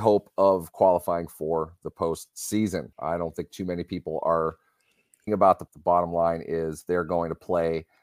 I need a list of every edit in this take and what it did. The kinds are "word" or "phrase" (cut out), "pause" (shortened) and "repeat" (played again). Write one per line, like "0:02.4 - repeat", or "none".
0:02.9 - pause
0:05.3 - phrase
0:05.7 - phrase

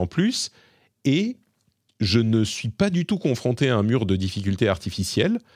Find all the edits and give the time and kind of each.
none

